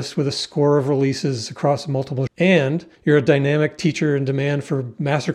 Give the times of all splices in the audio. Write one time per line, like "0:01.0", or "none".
0:02.3
0:02.9